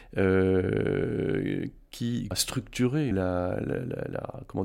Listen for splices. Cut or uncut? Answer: cut